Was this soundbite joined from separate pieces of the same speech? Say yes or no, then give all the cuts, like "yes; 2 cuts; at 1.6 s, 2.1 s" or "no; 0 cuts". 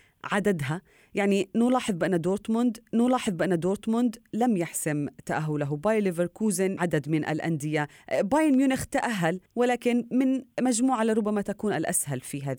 yes; 3 cuts; at 2.9 s, 6.8 s, 9.5 s